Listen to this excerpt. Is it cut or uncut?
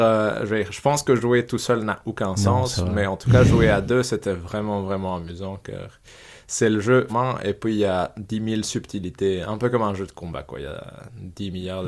cut